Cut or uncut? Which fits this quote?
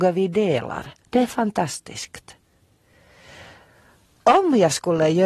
cut